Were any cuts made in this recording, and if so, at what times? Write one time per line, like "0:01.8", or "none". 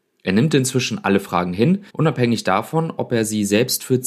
0:01.9